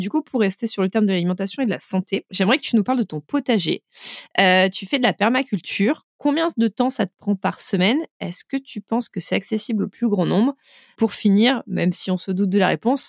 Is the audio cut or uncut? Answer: uncut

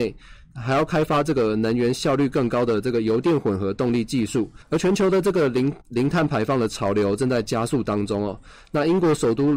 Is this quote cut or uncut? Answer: cut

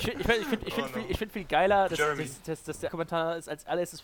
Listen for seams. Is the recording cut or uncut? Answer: cut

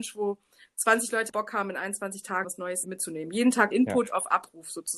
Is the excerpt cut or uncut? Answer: cut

